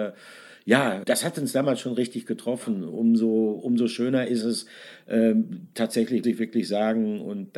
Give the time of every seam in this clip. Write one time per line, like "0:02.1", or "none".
0:01.0
0:06.2